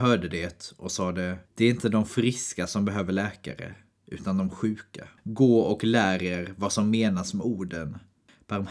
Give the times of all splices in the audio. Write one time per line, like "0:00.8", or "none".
0:01.5
0:05.2